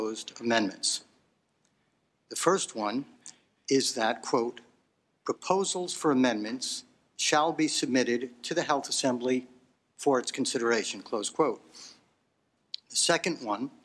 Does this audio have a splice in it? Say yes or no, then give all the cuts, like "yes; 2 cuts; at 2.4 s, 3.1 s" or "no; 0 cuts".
no; 0 cuts